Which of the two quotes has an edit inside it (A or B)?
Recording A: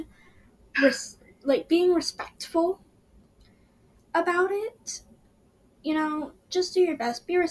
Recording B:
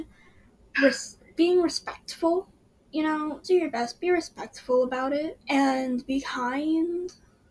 B